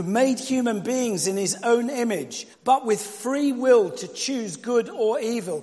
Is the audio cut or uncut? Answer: cut